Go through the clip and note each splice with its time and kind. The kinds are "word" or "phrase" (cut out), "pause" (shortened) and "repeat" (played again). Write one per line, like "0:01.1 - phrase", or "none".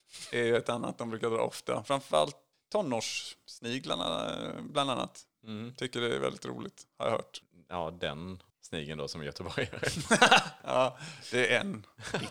0:08.5 - pause